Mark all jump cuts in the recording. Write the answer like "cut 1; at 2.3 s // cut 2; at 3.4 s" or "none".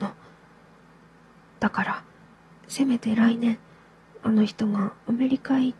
none